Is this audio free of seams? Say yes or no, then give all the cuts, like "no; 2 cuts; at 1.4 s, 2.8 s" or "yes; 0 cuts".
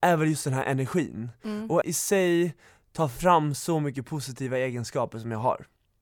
no; 1 cut; at 1.8 s